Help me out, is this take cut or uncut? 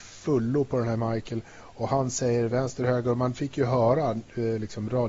uncut